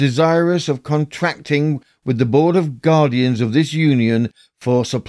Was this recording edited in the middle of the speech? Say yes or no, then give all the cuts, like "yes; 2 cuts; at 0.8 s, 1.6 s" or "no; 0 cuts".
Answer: no; 0 cuts